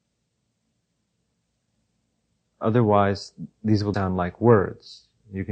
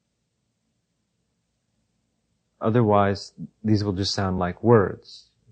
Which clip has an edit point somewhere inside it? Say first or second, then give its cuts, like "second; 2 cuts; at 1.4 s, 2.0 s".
first; 1 cut; at 3.9 s